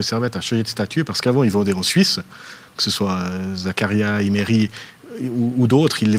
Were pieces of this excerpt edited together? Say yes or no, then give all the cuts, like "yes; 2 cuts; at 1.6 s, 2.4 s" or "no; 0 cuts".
no; 0 cuts